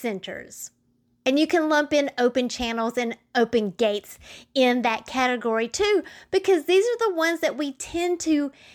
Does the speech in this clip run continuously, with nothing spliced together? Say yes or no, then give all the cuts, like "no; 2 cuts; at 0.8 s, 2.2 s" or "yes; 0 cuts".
yes; 0 cuts